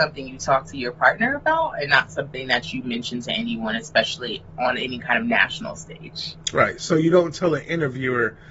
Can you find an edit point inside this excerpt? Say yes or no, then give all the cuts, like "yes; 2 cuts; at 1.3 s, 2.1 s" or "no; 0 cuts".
no; 0 cuts